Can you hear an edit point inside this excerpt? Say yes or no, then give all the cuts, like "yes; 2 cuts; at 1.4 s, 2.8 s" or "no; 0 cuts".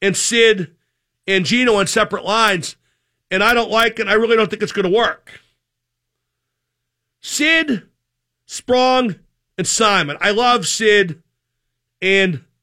no; 0 cuts